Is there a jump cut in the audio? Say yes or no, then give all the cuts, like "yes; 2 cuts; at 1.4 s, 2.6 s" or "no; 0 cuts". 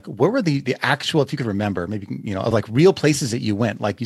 no; 0 cuts